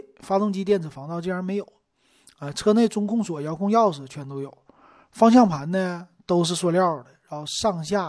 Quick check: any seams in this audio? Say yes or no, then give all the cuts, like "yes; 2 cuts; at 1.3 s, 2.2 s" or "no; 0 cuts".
no; 0 cuts